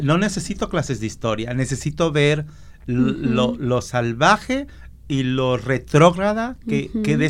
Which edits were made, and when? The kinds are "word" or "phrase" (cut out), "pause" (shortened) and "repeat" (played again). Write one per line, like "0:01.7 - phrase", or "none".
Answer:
none